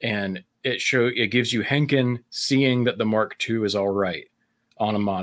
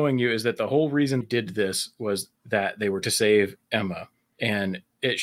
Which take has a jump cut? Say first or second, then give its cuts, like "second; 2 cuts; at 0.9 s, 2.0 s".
second; 4 cuts; at 1.2 s, 2.4 s, 3.0 s, 4.1 s